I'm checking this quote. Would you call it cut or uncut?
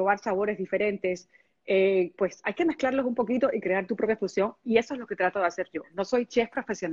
uncut